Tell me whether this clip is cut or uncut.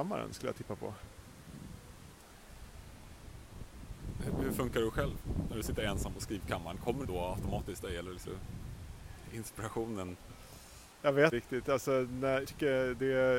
cut